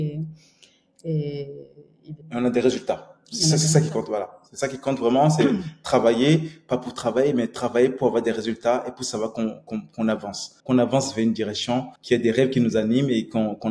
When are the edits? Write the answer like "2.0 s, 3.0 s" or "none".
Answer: 2.2 s, 10.6 s, 12.0 s